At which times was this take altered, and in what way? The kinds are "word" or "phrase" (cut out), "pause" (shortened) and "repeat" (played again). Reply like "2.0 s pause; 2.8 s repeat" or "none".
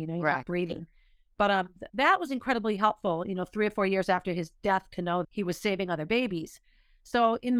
1.9 s word; 5.2 s word